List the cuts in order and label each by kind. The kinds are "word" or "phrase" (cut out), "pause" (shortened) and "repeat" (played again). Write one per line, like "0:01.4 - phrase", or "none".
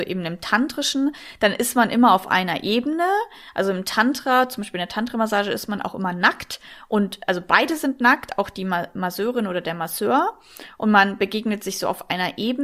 none